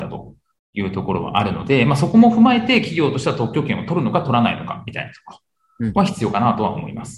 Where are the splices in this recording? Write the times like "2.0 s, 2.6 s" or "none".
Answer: none